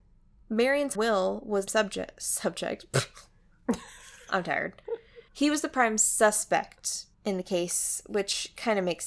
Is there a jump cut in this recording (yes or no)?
yes